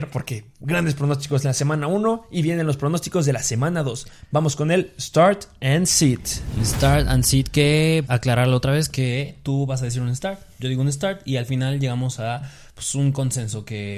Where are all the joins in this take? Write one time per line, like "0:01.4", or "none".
0:08.1